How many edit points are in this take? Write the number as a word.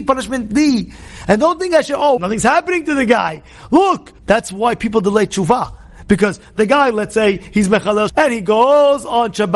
three